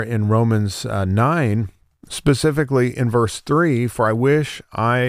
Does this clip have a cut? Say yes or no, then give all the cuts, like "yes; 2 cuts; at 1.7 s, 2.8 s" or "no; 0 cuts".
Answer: no; 0 cuts